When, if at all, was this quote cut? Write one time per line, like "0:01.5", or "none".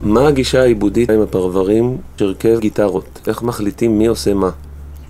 0:01.1
0:02.2
0:02.6